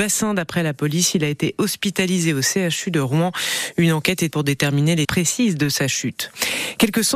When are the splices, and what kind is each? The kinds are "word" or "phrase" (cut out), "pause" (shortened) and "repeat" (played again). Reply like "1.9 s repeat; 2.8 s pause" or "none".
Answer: 4.3 s word; 5.0 s word